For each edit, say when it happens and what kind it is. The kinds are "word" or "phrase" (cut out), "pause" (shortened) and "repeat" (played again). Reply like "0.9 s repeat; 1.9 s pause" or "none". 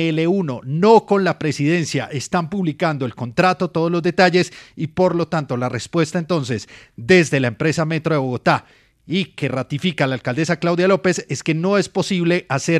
none